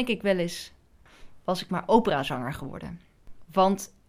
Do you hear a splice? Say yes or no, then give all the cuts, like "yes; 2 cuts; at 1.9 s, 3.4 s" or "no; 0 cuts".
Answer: no; 0 cuts